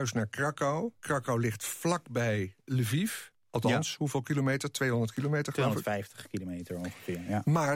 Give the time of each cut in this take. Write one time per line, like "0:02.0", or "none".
0:01.0
0:02.6